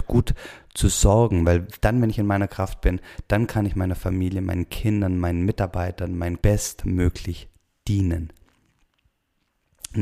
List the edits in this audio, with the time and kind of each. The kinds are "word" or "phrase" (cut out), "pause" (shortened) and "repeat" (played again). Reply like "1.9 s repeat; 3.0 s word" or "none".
6.4 s word